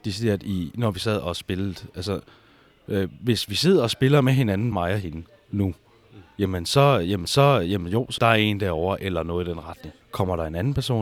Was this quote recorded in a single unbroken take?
no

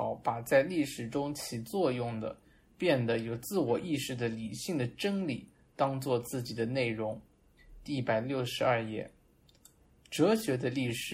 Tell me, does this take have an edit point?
no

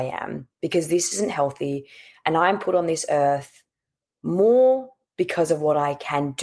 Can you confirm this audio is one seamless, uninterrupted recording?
yes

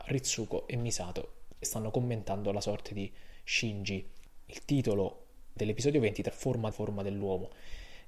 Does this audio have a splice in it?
yes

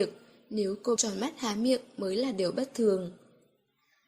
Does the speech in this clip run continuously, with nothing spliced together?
no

